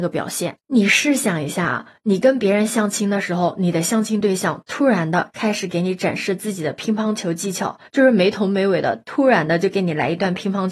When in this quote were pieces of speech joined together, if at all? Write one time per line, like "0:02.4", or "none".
0:07.9